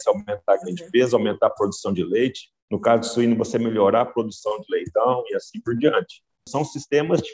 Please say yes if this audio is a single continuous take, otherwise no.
no